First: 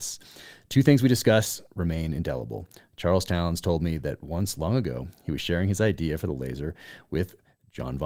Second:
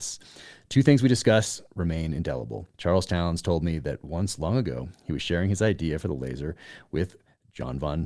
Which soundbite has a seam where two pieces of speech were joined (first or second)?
second